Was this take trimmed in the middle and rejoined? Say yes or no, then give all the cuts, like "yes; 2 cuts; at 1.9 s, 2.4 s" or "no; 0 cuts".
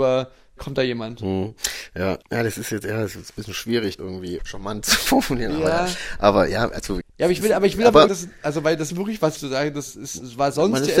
yes; 7 cuts; at 2.2 s, 4.0 s, 4.4 s, 7.0 s, 8.1 s, 8.9 s, 9.4 s